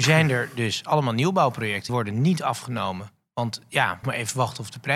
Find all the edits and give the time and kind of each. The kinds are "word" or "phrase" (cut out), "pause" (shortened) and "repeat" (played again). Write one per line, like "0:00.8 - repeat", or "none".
0:01.9 - word
0:04.0 - word